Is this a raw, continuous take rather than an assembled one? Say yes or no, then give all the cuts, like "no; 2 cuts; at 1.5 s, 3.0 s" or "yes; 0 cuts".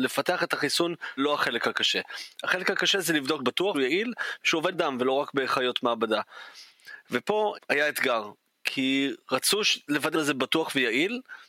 no; 6 cuts; at 1.2 s, 3.4 s, 3.7 s, 4.7 s, 7.5 s, 10.1 s